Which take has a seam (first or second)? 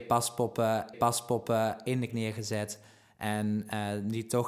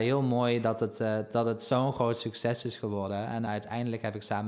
first